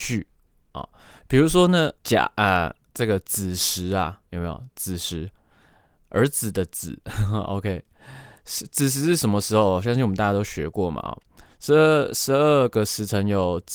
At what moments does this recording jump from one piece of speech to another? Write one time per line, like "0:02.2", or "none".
0:02.0

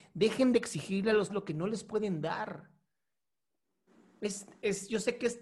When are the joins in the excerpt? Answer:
0:01.3

